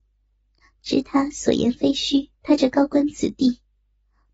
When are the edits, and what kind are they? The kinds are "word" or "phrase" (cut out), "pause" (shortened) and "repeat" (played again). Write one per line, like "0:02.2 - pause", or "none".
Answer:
0:02.3 - pause